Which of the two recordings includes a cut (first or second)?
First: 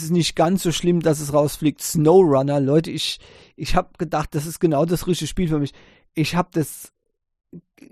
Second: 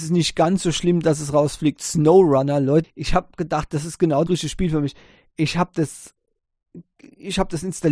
second